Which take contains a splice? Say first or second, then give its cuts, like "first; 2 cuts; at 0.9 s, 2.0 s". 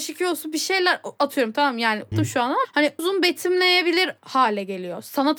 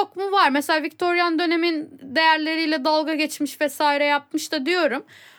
first; 3 cuts; at 2.1 s, 2.6 s, 3.0 s